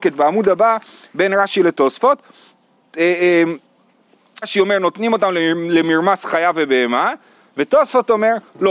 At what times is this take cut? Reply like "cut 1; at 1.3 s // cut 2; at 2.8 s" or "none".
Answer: cut 1; at 4.4 s